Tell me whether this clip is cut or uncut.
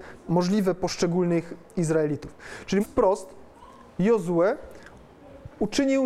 cut